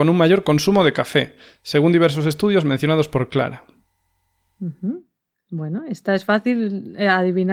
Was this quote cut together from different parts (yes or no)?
no